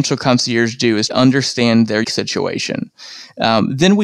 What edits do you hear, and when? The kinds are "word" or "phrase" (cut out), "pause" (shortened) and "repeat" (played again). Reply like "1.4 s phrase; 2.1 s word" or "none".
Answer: 1.1 s word; 2.0 s word